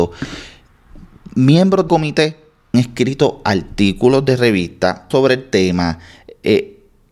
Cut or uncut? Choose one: cut